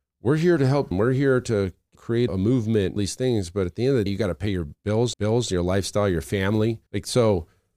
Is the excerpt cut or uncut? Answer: cut